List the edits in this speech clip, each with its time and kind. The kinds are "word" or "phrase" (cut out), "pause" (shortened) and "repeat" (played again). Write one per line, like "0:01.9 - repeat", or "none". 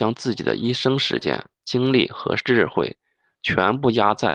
0:01.5 - pause